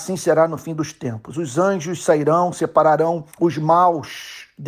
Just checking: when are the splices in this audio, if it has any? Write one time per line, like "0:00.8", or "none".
0:03.3